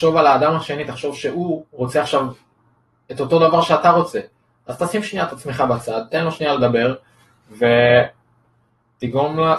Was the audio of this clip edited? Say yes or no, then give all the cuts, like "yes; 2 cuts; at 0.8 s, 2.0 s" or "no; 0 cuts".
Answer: no; 0 cuts